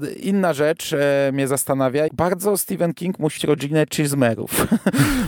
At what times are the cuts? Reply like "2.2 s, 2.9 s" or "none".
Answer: 2.1 s, 3.4 s